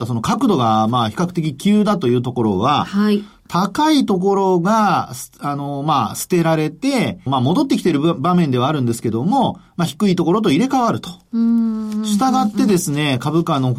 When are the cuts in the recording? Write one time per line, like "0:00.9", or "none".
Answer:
0:07.3